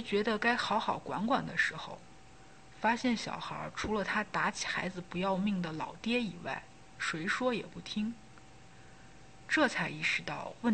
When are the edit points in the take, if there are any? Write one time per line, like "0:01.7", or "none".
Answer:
0:06.9